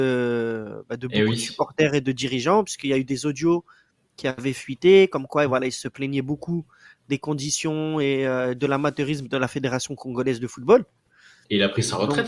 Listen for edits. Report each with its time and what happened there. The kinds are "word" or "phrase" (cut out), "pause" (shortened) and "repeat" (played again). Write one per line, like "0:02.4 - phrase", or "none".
none